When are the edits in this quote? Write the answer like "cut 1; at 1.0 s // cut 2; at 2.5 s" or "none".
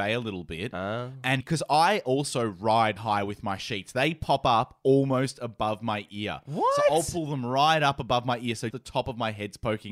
cut 1; at 1.4 s // cut 2; at 3.0 s // cut 3; at 8.7 s